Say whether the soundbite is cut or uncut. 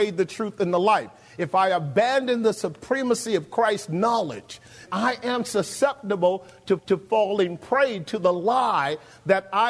cut